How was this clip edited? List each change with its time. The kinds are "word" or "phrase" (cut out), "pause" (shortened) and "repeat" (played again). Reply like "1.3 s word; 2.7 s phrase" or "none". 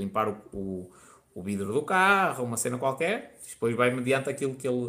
none